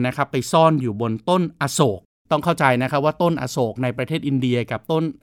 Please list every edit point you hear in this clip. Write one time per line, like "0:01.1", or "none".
0:02.1